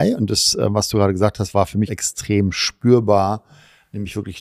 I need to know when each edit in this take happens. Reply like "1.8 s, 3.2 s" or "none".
1.9 s